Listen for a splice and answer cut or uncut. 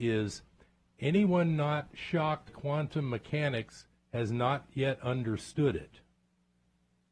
cut